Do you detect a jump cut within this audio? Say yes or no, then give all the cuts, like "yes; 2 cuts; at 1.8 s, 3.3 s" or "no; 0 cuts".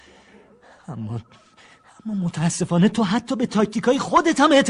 no; 0 cuts